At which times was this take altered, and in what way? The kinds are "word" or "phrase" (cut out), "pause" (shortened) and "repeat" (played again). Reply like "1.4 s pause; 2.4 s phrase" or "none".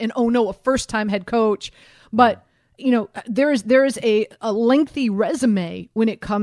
none